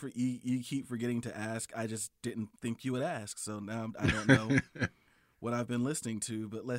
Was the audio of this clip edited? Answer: yes; 1 cut; at 2.5 s

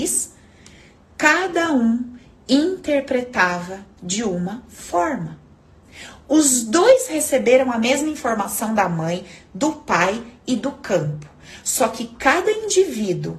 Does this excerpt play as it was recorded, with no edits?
yes; 0 cuts

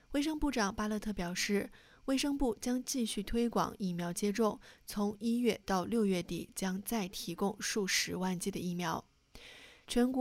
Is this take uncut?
yes; 0 cuts

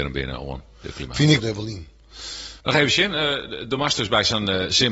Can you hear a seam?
yes; 2 cuts; at 1.4 s, 2.6 s

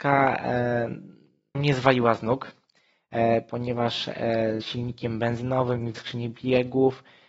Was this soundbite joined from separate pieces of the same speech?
yes; 3 cuts; at 1.5 s, 4.6 s, 5.9 s

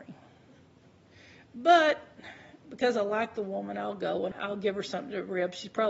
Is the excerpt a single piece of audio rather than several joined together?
no; 1 cut; at 2.6 s

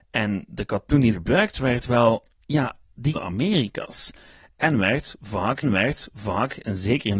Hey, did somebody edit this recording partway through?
yes; 4 cuts; at 1.1 s, 2.3 s, 3.1 s, 5.6 s

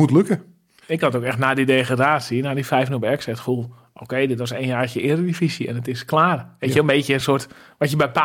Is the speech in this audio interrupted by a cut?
no; 0 cuts

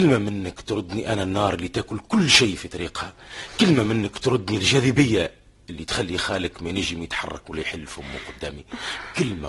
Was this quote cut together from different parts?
no; 0 cuts

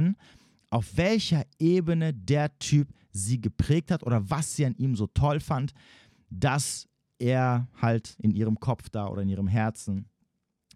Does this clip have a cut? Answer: yes; 1 cut; at 8.2 s

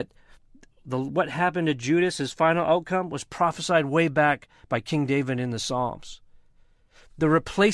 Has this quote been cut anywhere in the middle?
no; 0 cuts

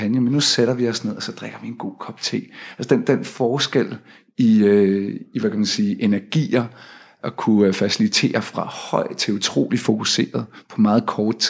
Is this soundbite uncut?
yes; 0 cuts

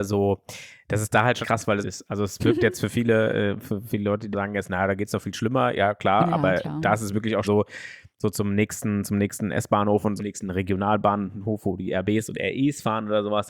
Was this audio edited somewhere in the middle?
yes; 5 cuts; at 1.4 s, 1.8 s, 4.3 s, 7.4 s, 10.2 s

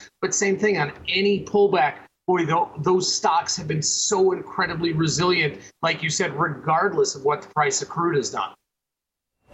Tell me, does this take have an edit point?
no; 0 cuts

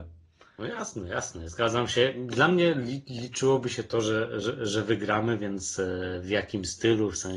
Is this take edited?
no; 0 cuts

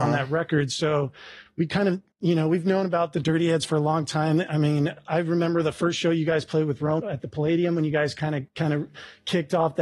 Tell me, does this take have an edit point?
yes; 3 cuts; at 2.1 s, 7.0 s, 8.5 s

